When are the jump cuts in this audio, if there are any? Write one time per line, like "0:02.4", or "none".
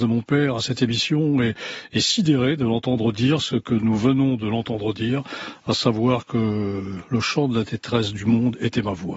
none